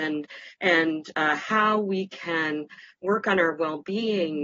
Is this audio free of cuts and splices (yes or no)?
yes